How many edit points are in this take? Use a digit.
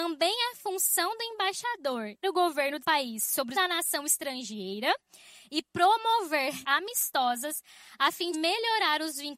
5